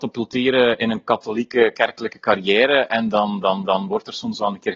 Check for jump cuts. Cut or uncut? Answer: cut